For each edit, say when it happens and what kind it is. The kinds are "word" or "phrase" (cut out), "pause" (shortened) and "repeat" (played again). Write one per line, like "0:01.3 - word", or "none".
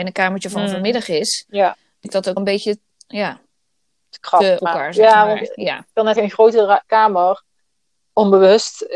0:02.0 - word
0:02.4 - word
0:04.6 - word
0:06.2 - word
0:06.8 - word